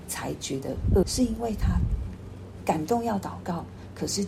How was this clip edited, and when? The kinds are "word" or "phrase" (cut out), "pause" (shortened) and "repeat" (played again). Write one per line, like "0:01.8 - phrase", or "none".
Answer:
0:01.0 - word